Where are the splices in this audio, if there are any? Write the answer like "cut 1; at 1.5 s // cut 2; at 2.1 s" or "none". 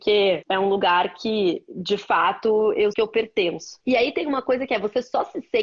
cut 1; at 2.9 s